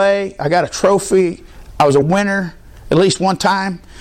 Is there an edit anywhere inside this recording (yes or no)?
no